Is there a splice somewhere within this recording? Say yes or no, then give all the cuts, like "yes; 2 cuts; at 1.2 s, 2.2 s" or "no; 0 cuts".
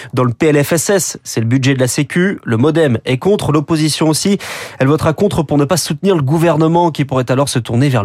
no; 0 cuts